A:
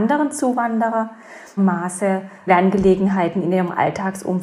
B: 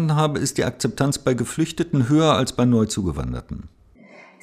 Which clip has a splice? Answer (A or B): A